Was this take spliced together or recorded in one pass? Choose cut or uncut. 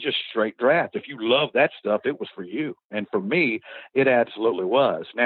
uncut